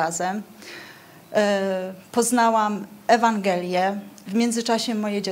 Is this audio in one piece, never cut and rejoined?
yes; 0 cuts

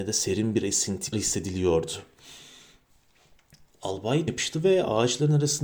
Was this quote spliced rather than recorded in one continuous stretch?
yes; 2 cuts; at 1.1 s, 4.3 s

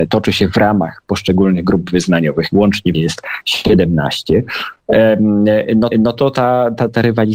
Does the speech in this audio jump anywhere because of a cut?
yes; 3 cuts; at 2.5 s, 2.9 s, 5.9 s

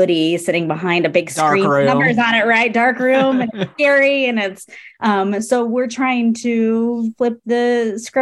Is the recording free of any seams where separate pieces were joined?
yes; 0 cuts

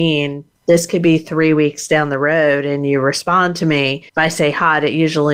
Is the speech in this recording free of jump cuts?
no; 1 cut; at 4.1 s

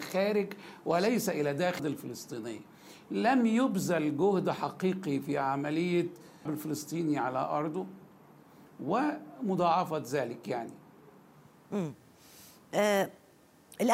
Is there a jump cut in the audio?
yes; 2 cuts; at 1.8 s, 6.5 s

